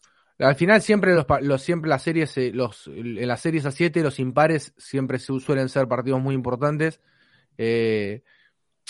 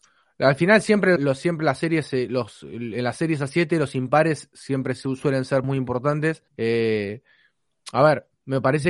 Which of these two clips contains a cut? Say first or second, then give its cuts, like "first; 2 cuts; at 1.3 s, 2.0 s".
second; 3 cuts; at 1.2 s, 5.6 s, 6.5 s